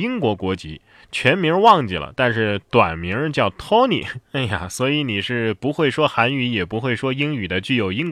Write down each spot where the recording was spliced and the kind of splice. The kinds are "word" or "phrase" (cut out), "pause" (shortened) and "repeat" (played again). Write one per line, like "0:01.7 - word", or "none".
0:04.2 - pause